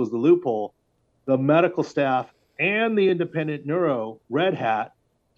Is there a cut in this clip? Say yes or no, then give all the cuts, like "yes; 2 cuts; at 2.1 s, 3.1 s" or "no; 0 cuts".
no; 0 cuts